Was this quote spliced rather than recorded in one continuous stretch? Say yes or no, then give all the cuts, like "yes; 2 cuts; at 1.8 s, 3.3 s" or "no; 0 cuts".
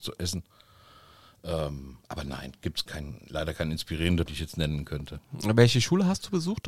yes; 3 cuts; at 2.0 s, 2.9 s, 4.3 s